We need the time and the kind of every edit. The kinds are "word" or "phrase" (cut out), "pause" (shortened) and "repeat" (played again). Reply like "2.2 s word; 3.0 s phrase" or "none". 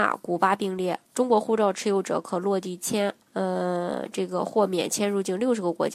1.1 s pause; 3.2 s pause